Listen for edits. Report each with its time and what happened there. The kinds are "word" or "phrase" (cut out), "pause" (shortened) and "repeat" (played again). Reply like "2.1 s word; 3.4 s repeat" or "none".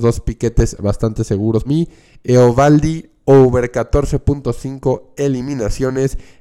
1.6 s word